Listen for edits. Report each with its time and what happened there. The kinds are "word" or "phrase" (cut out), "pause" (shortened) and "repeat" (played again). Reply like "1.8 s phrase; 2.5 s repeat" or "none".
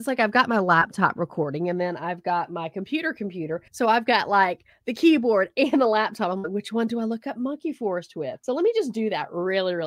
3.7 s pause